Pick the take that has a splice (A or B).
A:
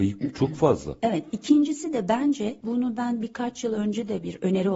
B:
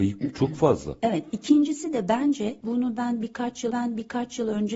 B